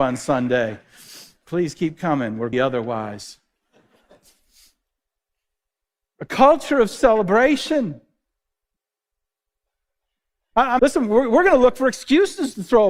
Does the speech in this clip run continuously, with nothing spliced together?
no; 2 cuts; at 2.5 s, 10.8 s

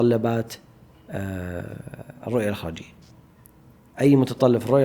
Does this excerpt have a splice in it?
no; 0 cuts

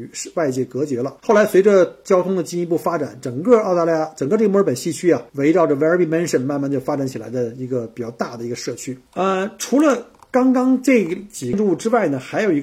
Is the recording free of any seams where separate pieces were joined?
no; 3 cuts; at 1.2 s, 5.3 s, 9.1 s

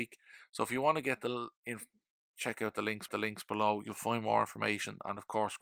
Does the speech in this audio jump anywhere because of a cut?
yes; 1 cut; at 3.1 s

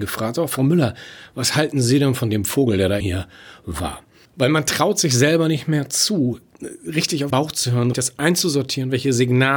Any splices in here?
yes; 3 cuts; at 3.0 s, 7.3 s, 7.9 s

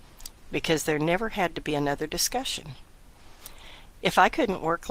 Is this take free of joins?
yes; 0 cuts

